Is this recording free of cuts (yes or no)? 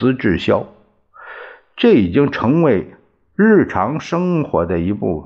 yes